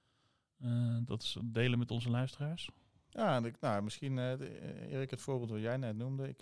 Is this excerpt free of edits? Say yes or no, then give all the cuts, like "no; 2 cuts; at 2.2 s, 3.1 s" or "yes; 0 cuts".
yes; 0 cuts